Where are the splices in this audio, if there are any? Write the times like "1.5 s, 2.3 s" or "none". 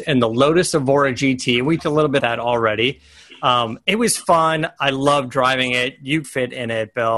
1.8 s, 2.2 s, 6.2 s